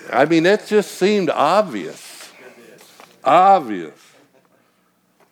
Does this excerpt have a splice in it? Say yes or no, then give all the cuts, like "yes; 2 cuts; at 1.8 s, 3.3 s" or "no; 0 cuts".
no; 0 cuts